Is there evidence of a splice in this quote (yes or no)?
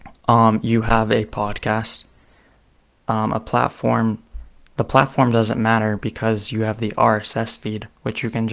no